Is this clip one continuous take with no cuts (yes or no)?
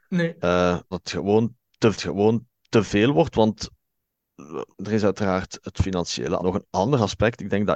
no